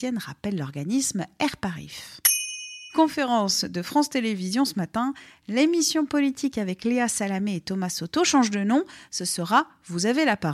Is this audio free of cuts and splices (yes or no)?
yes